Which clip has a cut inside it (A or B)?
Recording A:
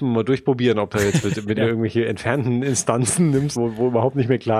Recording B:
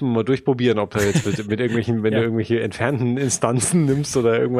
A